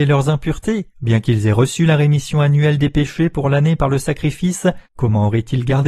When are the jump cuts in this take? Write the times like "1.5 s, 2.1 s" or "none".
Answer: 0.9 s, 4.9 s

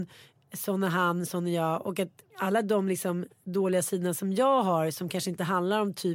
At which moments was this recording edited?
2.3 s

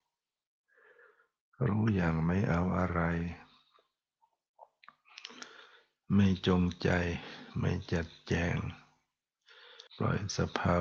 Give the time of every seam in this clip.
9.9 s

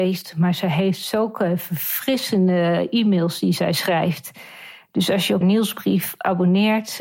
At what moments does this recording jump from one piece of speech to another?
5.4 s

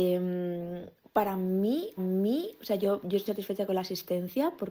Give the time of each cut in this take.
1.0 s, 2.0 s, 3.3 s

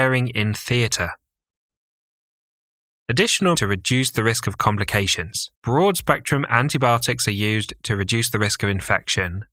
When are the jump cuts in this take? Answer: 3.5 s, 5.5 s

